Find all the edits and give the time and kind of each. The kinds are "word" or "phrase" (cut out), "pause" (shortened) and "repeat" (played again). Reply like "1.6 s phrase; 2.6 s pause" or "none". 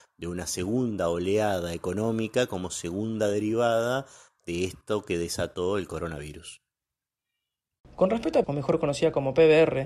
8.4 s word